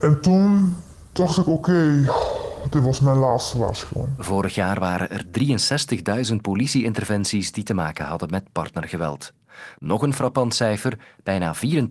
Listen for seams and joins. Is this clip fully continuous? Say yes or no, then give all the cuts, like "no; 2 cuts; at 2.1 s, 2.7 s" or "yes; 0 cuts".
yes; 0 cuts